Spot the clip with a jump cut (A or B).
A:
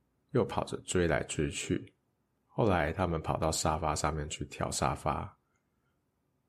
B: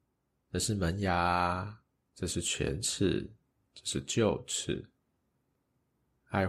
A